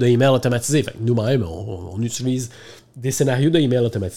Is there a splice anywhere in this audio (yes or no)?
no